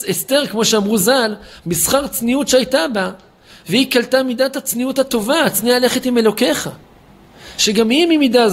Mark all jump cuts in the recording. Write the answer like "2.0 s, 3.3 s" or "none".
none